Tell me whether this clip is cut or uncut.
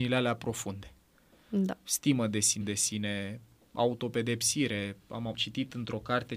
cut